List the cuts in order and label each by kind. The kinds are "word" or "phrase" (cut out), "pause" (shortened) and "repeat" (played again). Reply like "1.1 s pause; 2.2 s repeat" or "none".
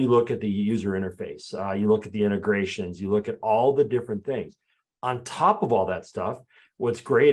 none